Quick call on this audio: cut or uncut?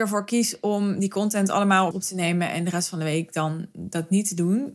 cut